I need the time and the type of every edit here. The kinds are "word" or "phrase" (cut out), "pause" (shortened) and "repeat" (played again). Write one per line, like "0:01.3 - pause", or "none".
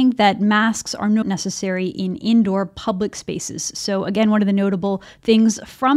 0:01.2 - word